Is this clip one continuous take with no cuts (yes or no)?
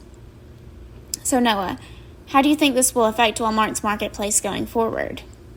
yes